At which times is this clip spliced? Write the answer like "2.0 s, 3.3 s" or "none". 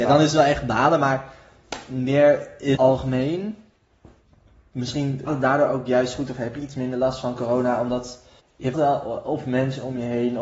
2.7 s, 5.3 s, 8.4 s, 8.7 s